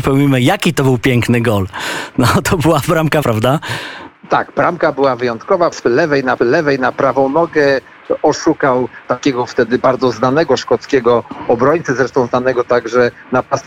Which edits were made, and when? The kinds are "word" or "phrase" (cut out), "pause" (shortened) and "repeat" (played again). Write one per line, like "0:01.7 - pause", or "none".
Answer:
0:03.2 - word
0:05.7 - phrase
0:06.4 - repeat
0:09.0 - word